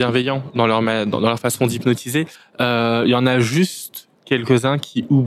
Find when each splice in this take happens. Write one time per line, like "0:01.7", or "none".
0:02.3